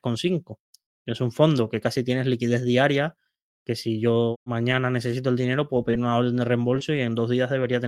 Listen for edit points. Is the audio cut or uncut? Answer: uncut